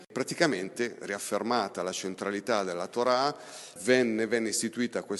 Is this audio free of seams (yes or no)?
no